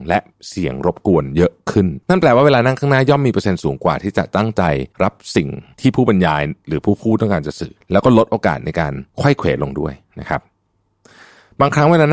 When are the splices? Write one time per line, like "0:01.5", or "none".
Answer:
0:02.0
0:04.9
0:07.8